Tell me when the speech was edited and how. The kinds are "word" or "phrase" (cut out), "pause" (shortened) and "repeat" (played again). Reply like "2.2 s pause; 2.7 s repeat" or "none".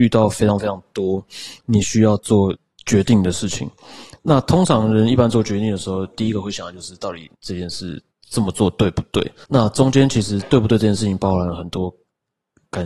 7.3 s pause; 8.1 s pause; 9.4 s pause

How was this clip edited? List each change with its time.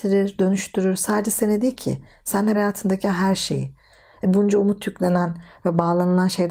2.5 s word

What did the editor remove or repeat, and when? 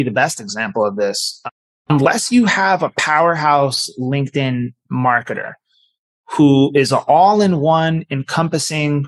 none

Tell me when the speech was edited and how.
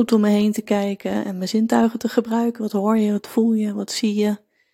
none

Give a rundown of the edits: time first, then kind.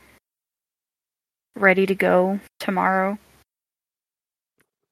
2.5 s pause

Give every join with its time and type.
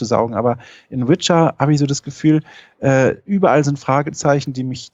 none

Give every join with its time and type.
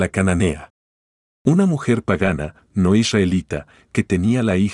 none

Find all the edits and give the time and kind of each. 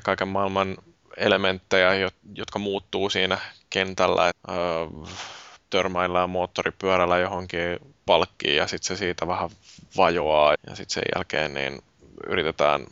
4.3 s word; 10.5 s word

